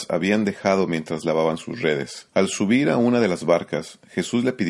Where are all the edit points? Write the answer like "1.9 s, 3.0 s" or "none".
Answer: 2.3 s